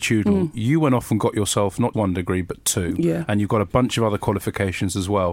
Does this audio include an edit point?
yes; 1 cut; at 1.9 s

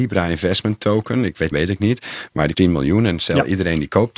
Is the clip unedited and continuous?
no; 2 cuts; at 1.5 s, 2.5 s

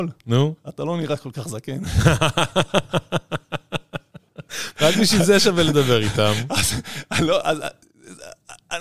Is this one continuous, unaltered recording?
yes; 0 cuts

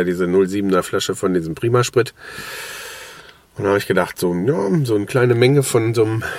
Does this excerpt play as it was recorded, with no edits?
yes; 0 cuts

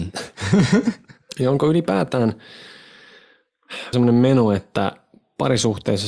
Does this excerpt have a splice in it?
yes; 1 cut; at 3.9 s

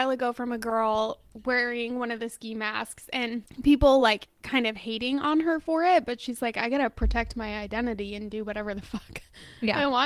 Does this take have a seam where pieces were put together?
no; 0 cuts

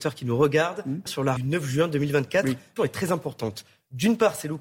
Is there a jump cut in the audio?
yes; 3 cuts; at 1.1 s, 1.4 s, 2.8 s

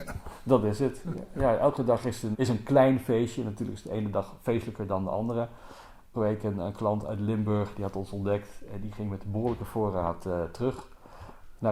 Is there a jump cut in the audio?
yes; 2 cuts; at 2.3 s, 6.1 s

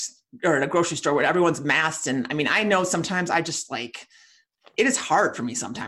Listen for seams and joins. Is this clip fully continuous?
yes; 0 cuts

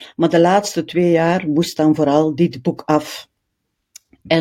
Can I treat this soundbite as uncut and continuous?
yes; 0 cuts

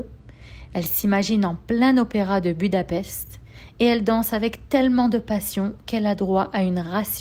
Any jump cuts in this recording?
no; 0 cuts

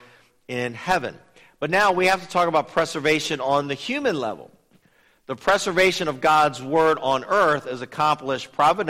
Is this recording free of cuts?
yes; 0 cuts

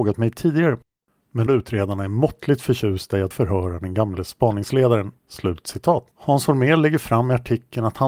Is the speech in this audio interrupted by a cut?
yes; 4 cuts; at 1.5 s, 3.3 s, 5.2 s, 6.1 s

